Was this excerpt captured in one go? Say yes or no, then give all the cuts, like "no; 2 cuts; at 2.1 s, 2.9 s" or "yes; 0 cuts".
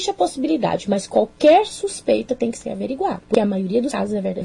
yes; 0 cuts